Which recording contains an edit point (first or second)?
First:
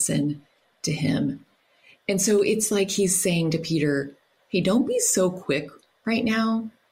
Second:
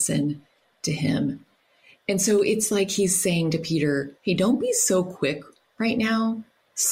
second